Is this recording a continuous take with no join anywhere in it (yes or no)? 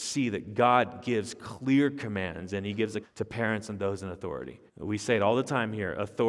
no